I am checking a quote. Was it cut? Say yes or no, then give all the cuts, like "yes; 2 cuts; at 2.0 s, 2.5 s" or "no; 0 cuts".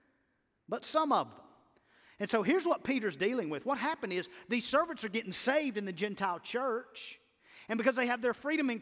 no; 0 cuts